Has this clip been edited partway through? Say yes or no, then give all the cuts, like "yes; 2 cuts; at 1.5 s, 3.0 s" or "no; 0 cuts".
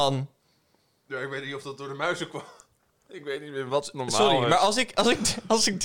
no; 0 cuts